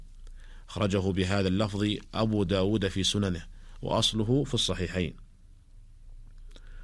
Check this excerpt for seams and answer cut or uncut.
uncut